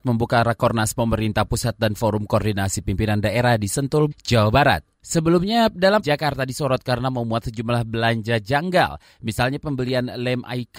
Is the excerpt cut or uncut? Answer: cut